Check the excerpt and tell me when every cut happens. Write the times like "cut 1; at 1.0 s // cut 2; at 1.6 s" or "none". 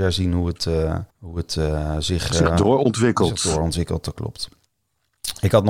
cut 1; at 1.1 s